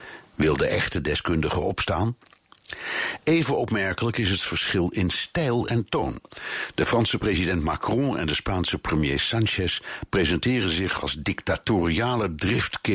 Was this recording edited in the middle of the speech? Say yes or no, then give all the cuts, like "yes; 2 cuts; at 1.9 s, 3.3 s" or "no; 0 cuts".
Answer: no; 0 cuts